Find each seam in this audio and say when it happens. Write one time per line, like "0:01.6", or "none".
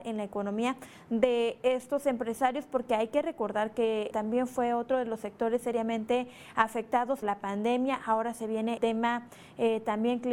0:04.1
0:07.2
0:08.8